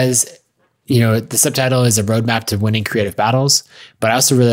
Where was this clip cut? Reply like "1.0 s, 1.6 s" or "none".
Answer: none